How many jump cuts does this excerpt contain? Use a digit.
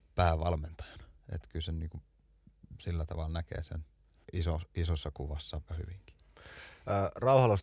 2